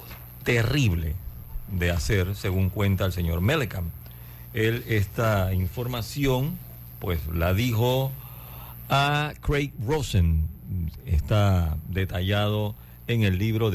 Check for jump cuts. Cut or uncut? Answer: uncut